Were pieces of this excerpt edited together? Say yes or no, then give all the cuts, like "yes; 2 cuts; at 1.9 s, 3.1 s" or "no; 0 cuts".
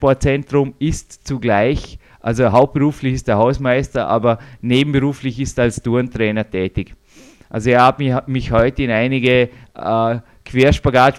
no; 0 cuts